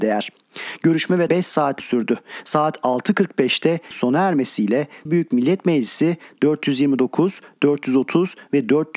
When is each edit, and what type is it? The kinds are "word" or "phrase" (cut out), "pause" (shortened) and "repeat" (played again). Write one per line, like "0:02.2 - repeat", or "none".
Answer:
0:01.3 - word
0:01.8 - word
0:03.9 - word
0:05.1 - word